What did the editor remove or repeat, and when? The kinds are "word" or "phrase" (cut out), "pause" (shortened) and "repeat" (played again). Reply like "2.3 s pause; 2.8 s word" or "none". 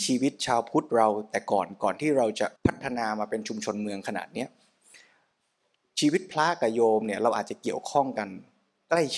2.6 s pause